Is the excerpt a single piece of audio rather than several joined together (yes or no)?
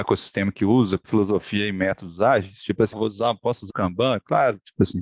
no